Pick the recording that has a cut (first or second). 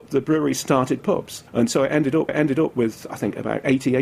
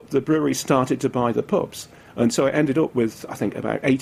first